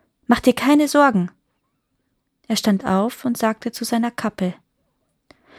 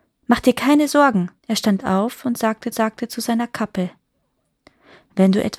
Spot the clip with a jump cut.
second; 2 cuts; at 1.4 s, 2.7 s

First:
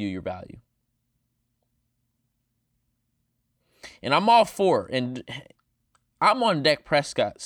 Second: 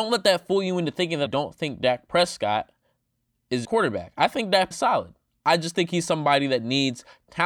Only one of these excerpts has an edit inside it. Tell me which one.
second; 3 cuts; at 1.3 s, 3.6 s, 4.7 s

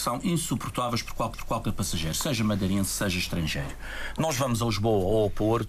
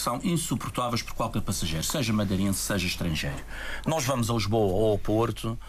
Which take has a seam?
first; 1 cut; at 1.3 s

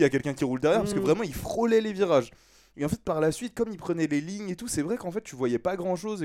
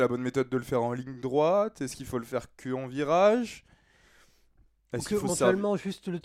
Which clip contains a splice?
second; 1 cut; at 5.3 s

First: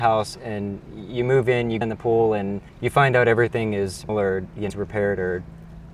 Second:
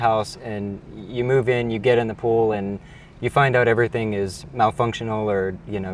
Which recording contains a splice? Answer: first; 4 cuts; at 1.8 s, 2.7 s, 4.1 s, 4.7 s

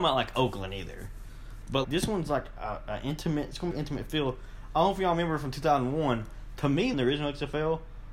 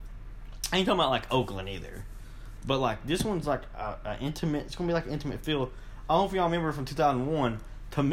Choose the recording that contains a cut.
first; 3 cuts; at 1.8 s, 3.7 s, 6.9 s

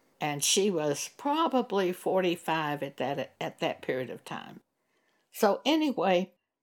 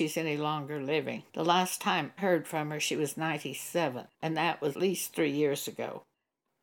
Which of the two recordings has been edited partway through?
second; 4 cuts; at 1.3 s, 2.2 s, 4.1 s, 4.7 s

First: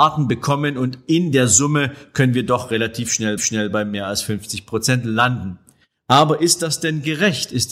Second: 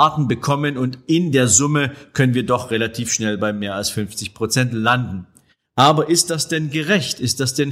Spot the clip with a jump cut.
first; 1 cut; at 3.4 s

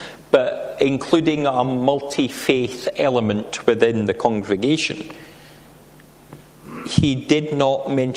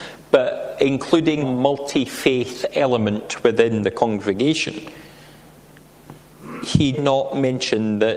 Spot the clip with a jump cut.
second; 2 cuts; at 1.4 s, 6.9 s

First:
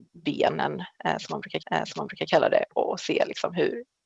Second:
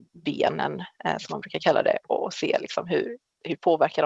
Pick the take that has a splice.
first; 1 cut; at 1.6 s

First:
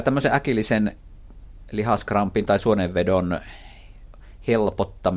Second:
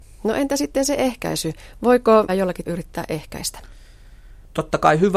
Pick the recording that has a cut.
second; 2 cuts; at 2.3 s, 2.7 s

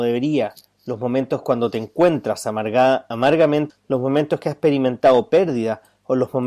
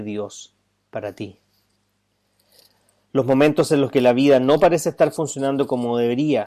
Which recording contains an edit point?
first; 1 cut; at 3.7 s

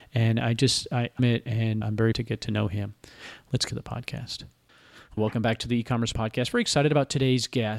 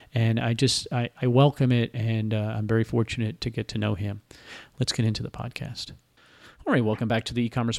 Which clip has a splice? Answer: first; 6 cuts; at 1.2 s, 1.8 s, 2.1 s, 3.7 s, 5.2 s, 6.1 s

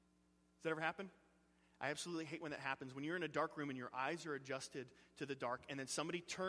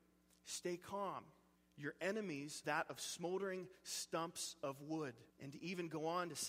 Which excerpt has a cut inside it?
second; 3 cuts; at 1.6 s, 2.6 s, 5.3 s

